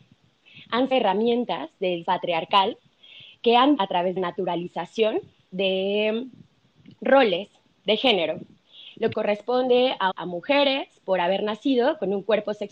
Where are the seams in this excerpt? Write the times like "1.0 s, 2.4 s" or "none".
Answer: 0.9 s, 2.0 s, 3.8 s, 4.2 s, 9.1 s, 10.1 s